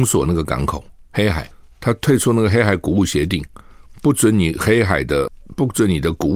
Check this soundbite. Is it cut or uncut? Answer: uncut